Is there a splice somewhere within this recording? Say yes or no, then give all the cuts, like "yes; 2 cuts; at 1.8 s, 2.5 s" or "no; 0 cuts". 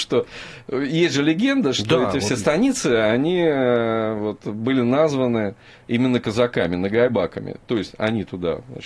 no; 0 cuts